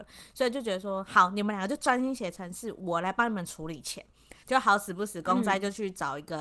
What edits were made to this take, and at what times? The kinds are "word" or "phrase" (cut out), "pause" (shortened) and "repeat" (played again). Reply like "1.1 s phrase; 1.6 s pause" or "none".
4.4 s pause

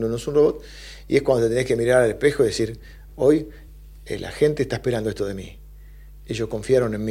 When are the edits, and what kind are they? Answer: none

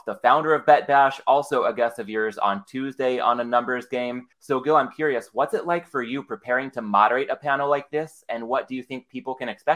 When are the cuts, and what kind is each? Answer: 4.3 s pause

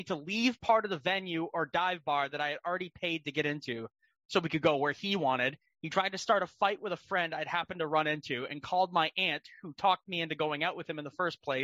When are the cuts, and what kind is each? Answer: none

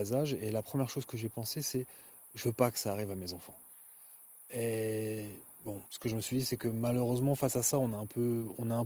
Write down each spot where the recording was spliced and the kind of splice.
5.9 s pause

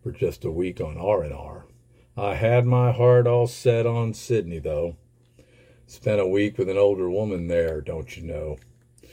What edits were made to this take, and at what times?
none

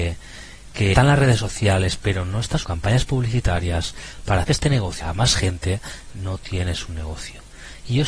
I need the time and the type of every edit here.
0.9 s word; 2.6 s word; 4.4 s word; 5.0 s word; 6.1 s word

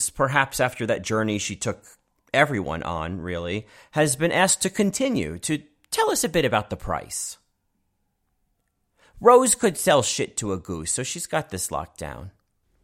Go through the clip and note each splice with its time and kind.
none

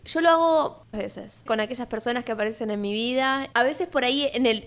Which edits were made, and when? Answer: 0.9 s word; 1.5 s word; 3.5 s word

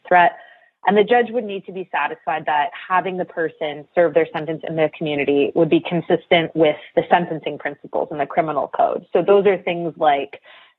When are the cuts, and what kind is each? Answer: none

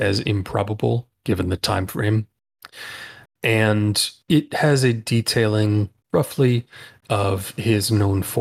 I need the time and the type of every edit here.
4.2 s pause

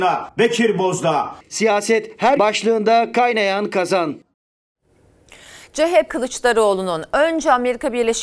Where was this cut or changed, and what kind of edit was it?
2.4 s word; 6.1 s word

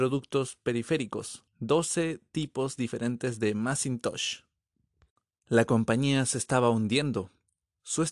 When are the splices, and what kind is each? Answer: 1.5 s pause

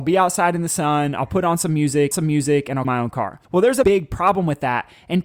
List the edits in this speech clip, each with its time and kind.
2.1 s repeat; 2.8 s word; 3.4 s pause; 3.8 s word

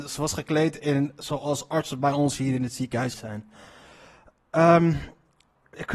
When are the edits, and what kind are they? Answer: 3.1 s word

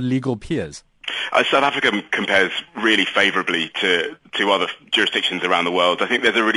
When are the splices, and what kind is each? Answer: 2.7 s pause; 4.2 s word

